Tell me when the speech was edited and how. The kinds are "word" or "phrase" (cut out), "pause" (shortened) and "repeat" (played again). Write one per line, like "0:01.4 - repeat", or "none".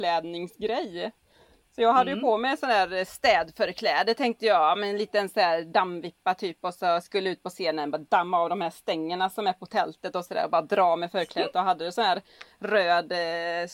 none

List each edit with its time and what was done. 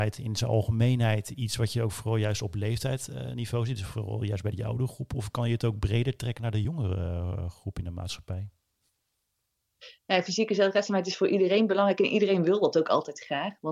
none

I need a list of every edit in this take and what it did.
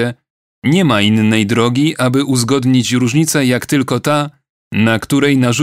none

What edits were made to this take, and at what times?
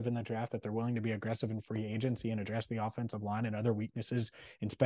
none

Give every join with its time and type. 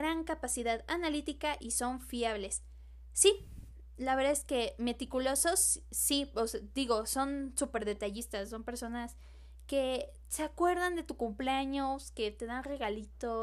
none

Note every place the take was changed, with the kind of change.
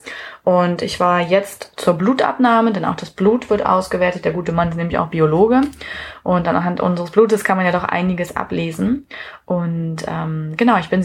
none

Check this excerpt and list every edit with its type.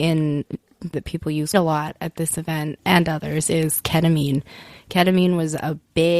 0:00.9 - phrase
0:01.5 - word
0:02.8 - word

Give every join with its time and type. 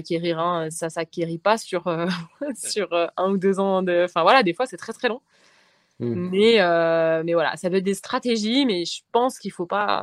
none

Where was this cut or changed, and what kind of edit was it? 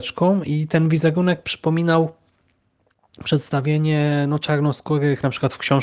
none

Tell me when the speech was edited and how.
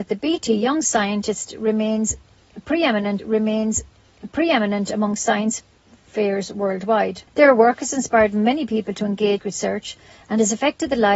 0:03.2 - repeat
0:07.3 - pause
0:09.4 - phrase

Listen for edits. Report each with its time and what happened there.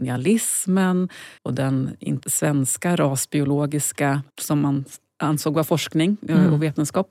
0:01.4 - pause
0:02.2 - word
0:04.3 - pause

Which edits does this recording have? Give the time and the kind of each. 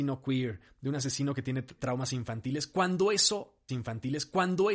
0:01.8 - word
0:03.7 - repeat

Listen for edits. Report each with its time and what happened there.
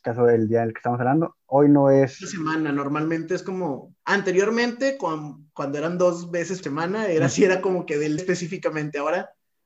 0:04.0 - pause
0:06.6 - word
0:08.2 - word

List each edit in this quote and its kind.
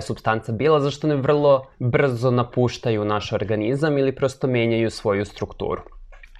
0:01.7 - pause

